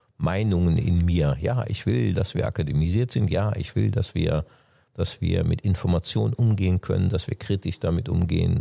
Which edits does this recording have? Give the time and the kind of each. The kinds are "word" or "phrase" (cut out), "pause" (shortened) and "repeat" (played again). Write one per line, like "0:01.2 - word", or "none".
none